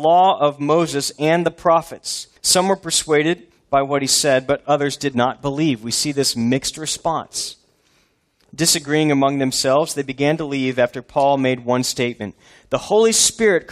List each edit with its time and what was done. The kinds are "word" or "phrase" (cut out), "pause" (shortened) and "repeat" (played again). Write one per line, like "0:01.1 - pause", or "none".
0:02.4 - pause